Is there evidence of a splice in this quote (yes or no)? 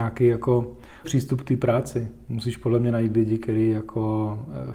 yes